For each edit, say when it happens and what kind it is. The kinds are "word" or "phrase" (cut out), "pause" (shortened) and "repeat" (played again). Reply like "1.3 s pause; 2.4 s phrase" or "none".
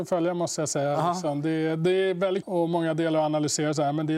2.4 s word